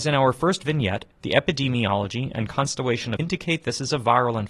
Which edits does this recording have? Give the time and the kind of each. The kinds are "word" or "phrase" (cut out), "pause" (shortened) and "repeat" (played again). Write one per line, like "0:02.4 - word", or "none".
0:01.1 - pause
0:03.2 - phrase